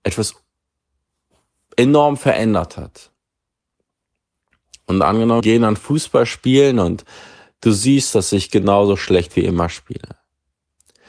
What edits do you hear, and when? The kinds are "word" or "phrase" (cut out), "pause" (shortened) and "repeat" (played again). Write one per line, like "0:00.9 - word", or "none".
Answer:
0:05.4 - word